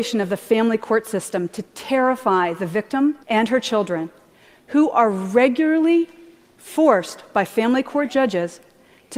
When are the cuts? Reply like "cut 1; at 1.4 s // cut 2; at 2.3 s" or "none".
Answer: cut 1; at 3.2 s